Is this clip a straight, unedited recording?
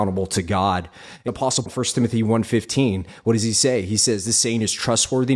no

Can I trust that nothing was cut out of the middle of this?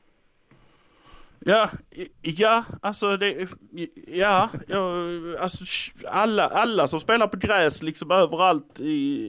no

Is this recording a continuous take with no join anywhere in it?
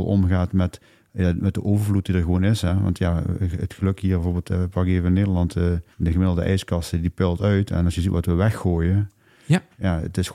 no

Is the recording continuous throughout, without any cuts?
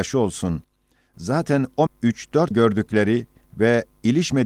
no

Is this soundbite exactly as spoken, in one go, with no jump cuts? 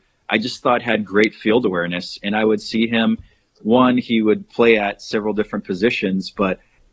yes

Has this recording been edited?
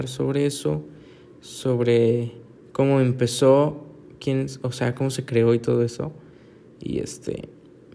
no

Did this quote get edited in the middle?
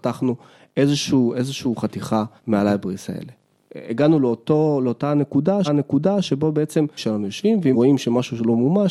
yes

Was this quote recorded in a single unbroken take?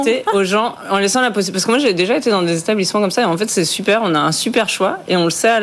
yes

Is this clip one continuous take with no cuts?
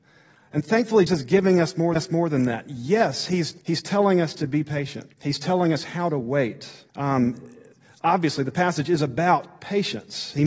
no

